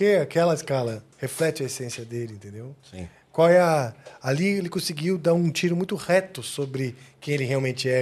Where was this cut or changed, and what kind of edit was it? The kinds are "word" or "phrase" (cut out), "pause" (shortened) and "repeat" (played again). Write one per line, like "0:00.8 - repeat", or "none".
0:01.1 - pause